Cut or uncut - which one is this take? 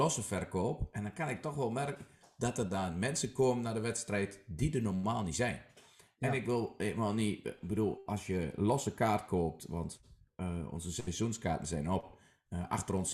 uncut